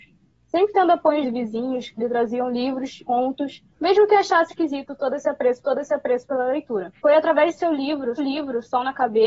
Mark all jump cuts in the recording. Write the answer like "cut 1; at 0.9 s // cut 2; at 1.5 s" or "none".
cut 1; at 1.2 s // cut 2; at 3.0 s // cut 3; at 3.7 s // cut 4; at 4.5 s // cut 5; at 5.6 s // cut 6; at 7.0 s // cut 7; at 8.2 s